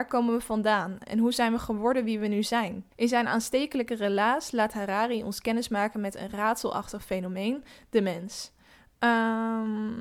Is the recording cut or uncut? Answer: cut